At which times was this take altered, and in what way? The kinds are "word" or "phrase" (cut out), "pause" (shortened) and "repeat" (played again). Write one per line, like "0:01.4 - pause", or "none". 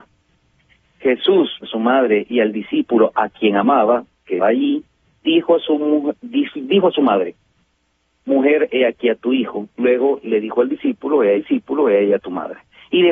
0:01.6 - word
0:04.4 - word
0:09.7 - pause
0:11.3 - repeat